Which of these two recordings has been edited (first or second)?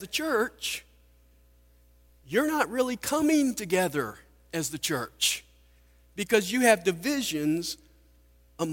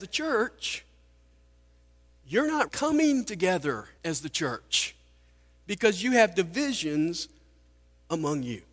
second